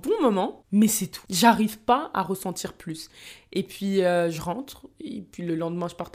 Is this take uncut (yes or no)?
yes